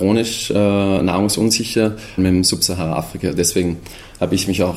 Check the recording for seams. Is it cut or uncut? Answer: cut